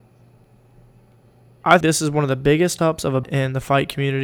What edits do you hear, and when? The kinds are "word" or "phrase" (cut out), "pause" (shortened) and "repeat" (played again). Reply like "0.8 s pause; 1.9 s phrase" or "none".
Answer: 1.8 s word; 2.8 s word; 3.2 s phrase

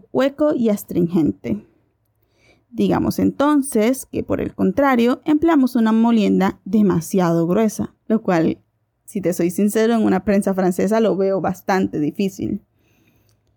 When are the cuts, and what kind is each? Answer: 8.0 s pause

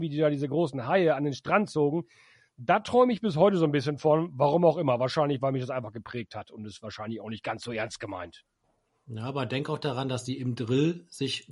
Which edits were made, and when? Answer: none

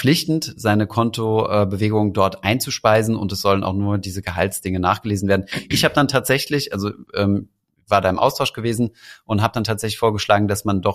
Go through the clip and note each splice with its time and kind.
none

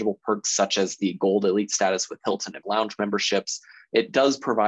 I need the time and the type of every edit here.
2.6 s phrase

